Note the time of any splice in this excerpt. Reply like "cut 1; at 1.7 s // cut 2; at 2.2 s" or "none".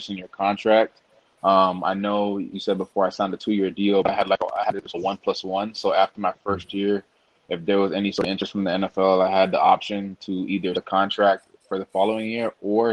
cut 1; at 2.5 s // cut 2; at 4.9 s // cut 3; at 10.7 s